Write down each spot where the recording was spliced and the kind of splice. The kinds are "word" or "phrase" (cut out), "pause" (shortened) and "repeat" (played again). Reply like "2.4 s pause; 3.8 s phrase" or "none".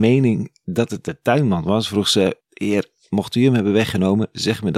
2.4 s pause